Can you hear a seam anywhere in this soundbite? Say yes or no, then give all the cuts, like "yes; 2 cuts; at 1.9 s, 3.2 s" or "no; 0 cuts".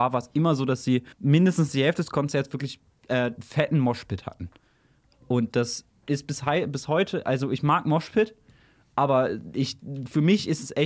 yes; 1 cut; at 1.1 s